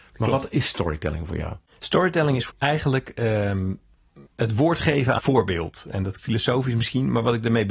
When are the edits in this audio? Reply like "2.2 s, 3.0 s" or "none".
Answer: 1.7 s, 2.5 s, 4.3 s, 5.2 s, 6.2 s